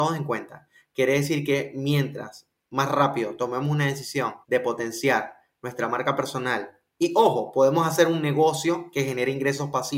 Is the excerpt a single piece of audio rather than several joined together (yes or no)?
no